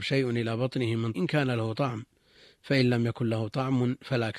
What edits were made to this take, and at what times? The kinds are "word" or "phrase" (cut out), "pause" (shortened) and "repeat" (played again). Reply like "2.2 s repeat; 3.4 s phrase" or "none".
1.1 s word